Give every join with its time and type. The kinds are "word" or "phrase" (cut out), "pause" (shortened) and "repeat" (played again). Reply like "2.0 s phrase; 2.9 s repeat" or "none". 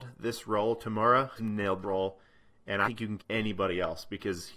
1.4 s word; 1.8 s word; 2.8 s word; 3.2 s word